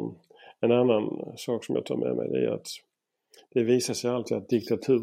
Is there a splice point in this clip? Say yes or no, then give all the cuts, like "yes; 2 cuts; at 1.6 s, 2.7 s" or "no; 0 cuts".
no; 0 cuts